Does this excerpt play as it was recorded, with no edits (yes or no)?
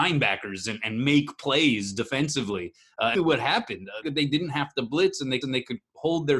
no